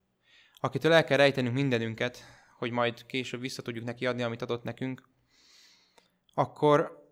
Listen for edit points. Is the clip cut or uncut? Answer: uncut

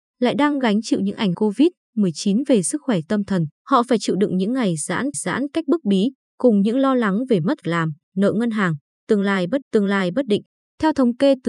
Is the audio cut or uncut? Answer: cut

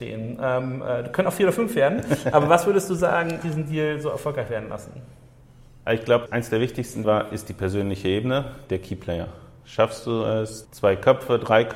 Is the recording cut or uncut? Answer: cut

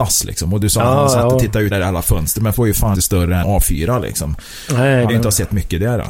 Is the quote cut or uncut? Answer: cut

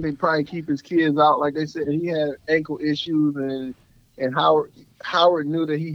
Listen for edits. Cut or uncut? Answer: uncut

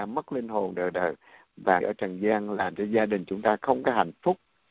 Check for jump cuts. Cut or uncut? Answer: cut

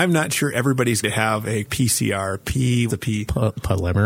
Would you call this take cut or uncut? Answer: cut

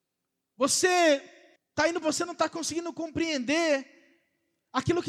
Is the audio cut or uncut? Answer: cut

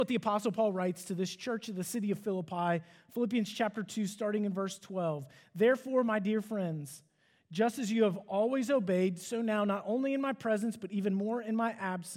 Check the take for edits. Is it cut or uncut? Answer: uncut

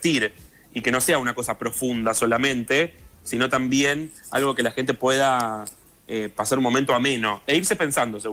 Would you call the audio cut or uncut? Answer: uncut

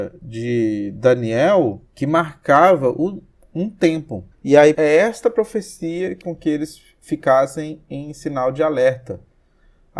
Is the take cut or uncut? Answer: cut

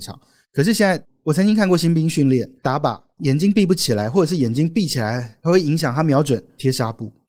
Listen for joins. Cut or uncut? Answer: cut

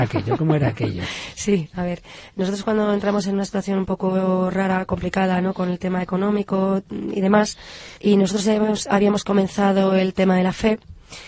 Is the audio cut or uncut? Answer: cut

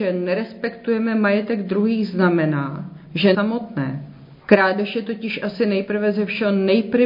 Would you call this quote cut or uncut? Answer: cut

